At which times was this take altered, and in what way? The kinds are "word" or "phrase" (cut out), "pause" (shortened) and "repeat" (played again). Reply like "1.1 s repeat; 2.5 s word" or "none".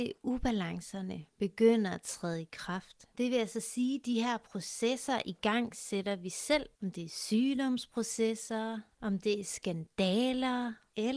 6.7 s pause